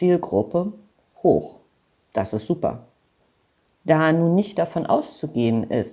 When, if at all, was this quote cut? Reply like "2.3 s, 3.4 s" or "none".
none